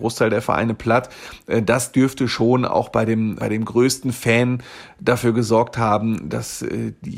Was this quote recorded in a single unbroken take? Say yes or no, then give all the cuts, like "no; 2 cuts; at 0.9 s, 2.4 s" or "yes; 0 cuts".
no; 1 cut; at 3.4 s